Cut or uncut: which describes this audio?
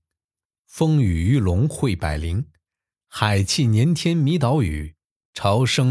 uncut